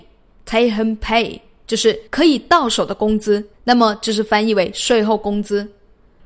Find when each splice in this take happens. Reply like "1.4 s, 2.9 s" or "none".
2.1 s, 3.5 s

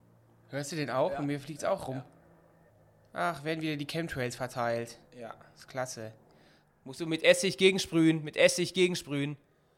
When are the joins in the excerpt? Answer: 2.7 s, 5.1 s

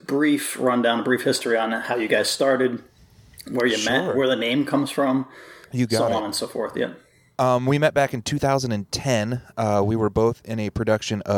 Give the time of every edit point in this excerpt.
none

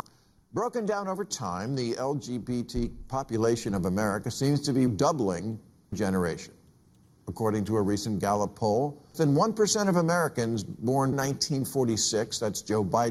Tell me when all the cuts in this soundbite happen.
4.9 s, 5.9 s, 9.1 s, 11.1 s

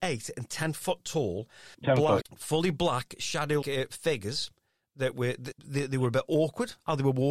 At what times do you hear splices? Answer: 1.7 s, 2.2 s, 3.6 s, 5.5 s

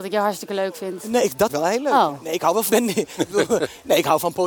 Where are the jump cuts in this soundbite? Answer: 1.5 s, 2.7 s

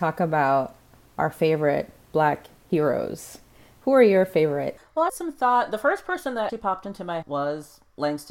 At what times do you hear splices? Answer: 5.1 s, 6.5 s, 7.2 s

